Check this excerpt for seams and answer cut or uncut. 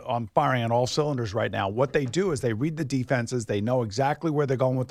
uncut